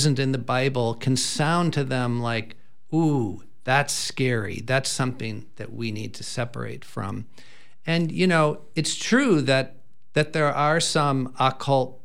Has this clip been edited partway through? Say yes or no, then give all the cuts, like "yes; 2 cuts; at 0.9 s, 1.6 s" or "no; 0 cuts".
no; 0 cuts